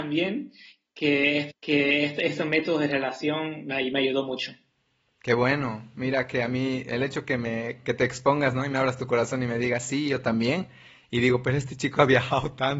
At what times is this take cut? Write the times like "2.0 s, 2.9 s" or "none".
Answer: 1.5 s